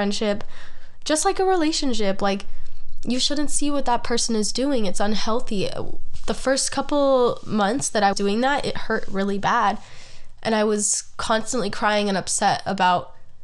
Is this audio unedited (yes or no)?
no